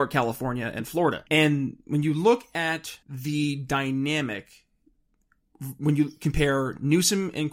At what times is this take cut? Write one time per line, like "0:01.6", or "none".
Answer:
0:01.3
0:03.0